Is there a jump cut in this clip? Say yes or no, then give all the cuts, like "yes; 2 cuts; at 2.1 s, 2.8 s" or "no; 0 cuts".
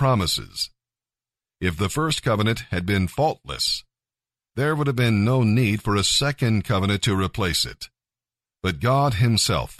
no; 0 cuts